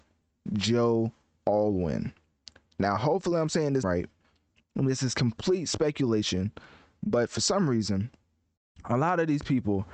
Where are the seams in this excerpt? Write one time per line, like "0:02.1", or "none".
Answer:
0:03.8

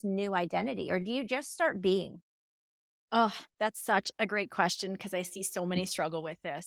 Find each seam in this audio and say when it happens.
none

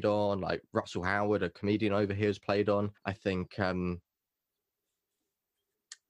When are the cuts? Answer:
0:03.0

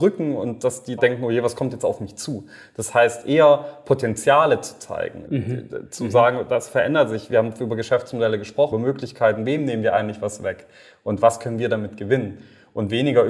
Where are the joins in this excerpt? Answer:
0:01.0
0:05.3
0:08.7

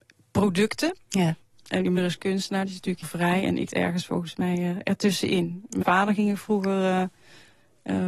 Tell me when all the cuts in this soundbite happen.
0:02.0
0:03.0
0:03.7
0:05.8

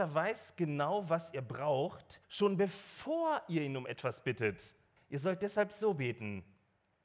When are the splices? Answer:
0:02.2
0:05.0

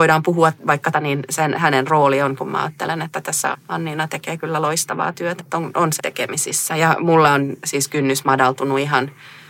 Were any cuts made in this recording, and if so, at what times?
0:00.9
0:02.4
0:03.5
0:05.4
0:06.0

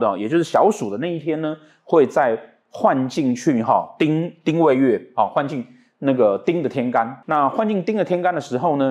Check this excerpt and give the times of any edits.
none

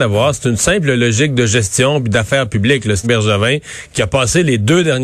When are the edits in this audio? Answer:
0:03.0

